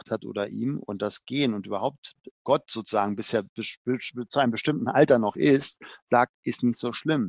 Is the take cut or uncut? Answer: uncut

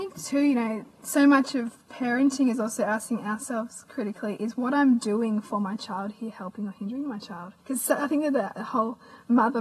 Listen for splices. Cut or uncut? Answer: cut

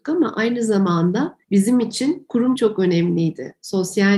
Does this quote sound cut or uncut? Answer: cut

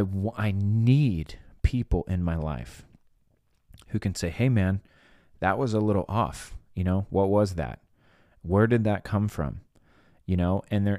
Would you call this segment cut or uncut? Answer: uncut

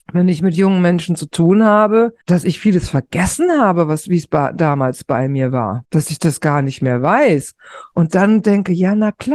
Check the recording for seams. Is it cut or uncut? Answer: uncut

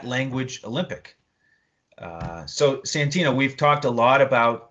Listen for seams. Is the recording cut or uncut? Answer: uncut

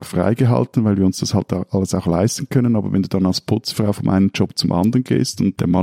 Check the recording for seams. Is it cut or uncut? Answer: uncut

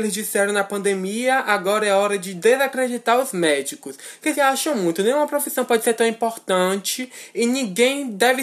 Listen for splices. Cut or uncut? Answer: cut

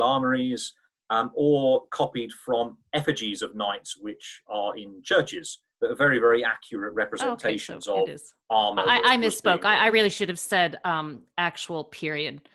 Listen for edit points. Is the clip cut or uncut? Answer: uncut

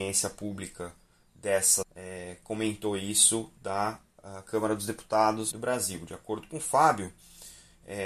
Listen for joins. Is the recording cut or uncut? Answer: cut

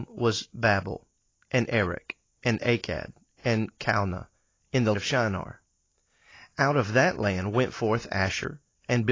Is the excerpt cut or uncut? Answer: cut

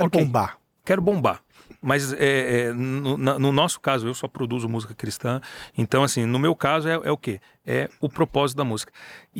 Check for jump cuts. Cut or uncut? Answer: uncut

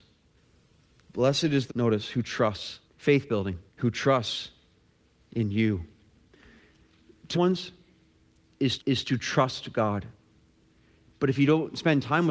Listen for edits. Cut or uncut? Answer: cut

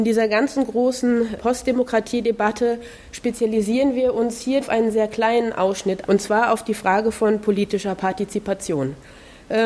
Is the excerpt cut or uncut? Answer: cut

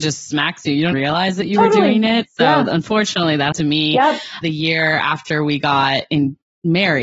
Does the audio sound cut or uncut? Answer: cut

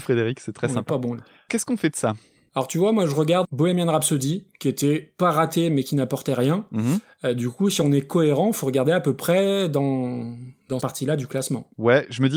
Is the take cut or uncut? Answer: cut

